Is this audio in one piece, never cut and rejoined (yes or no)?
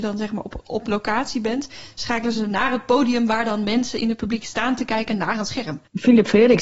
yes